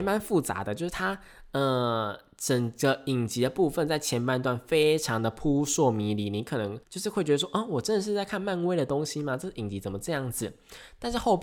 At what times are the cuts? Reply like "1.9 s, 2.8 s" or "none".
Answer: 6.8 s